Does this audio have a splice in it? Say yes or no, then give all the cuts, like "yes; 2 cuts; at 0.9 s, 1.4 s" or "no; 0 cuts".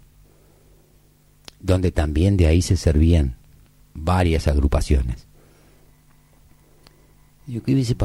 no; 0 cuts